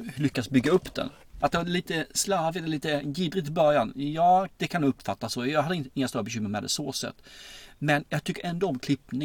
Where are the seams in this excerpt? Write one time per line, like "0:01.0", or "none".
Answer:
0:04.5